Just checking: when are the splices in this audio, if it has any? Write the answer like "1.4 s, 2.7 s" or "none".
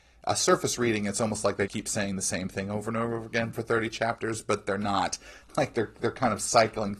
1.7 s